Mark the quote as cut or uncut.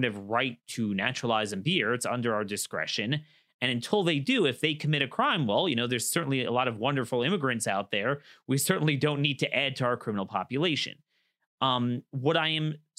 uncut